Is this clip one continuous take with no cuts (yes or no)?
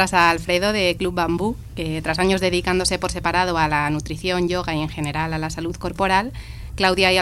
yes